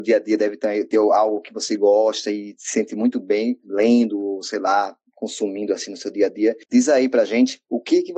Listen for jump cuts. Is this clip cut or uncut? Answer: cut